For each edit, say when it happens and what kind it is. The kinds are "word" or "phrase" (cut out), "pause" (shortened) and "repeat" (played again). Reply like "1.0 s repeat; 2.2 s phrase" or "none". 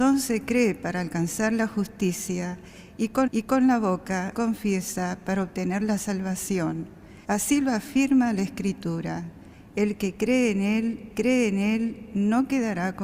3.3 s repeat; 4.3 s word; 7.2 s pause; 11.1 s repeat